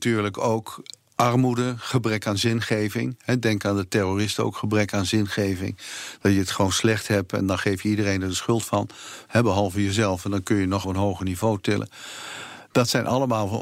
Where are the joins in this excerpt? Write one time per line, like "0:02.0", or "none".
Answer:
0:10.8